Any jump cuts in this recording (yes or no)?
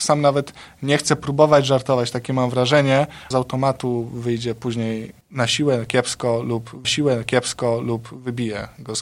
yes